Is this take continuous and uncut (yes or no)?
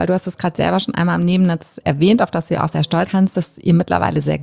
no